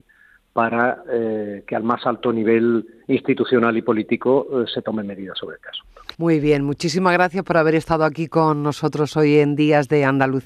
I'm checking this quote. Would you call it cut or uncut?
cut